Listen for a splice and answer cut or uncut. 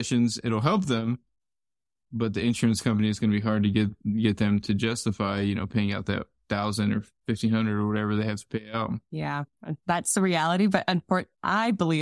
cut